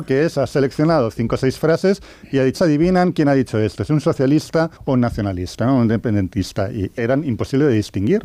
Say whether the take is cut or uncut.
cut